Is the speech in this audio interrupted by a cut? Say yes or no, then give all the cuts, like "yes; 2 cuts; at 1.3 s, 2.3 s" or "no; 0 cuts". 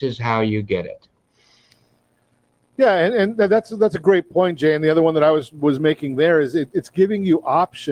no; 0 cuts